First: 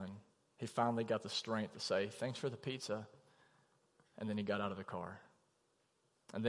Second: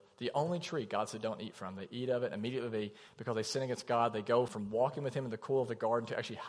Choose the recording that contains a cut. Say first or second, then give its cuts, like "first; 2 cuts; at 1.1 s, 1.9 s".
second; 1 cut; at 4.5 s